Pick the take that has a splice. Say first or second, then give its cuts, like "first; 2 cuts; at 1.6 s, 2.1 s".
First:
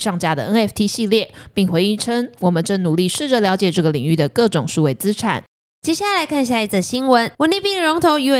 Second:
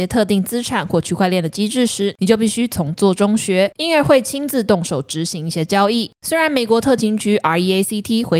first; 1 cut; at 7.3 s